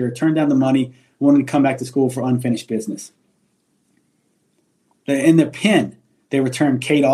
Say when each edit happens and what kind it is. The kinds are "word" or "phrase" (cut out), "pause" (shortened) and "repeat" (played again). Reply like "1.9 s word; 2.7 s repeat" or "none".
none